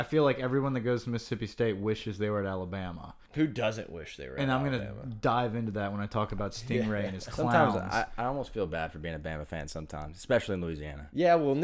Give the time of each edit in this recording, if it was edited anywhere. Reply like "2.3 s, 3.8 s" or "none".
3.2 s